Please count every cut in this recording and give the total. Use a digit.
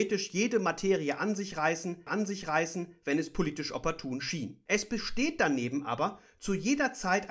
2